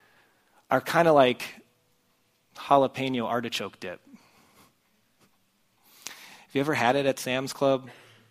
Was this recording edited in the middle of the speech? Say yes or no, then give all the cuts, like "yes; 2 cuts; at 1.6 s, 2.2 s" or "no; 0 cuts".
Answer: no; 0 cuts